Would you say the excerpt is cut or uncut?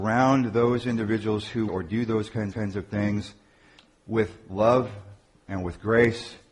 cut